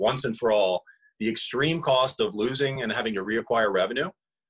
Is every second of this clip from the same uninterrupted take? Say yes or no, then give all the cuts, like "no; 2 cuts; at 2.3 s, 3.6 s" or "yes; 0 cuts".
yes; 0 cuts